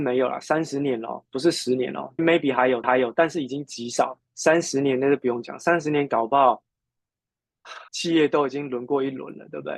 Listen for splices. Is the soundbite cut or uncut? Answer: cut